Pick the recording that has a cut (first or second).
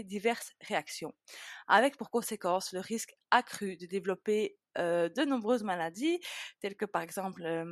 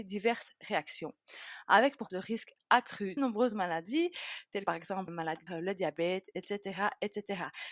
second